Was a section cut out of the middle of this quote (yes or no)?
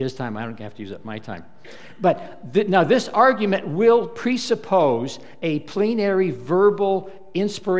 no